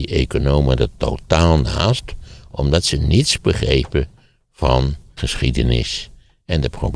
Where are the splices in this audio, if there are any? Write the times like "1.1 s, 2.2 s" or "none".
5.2 s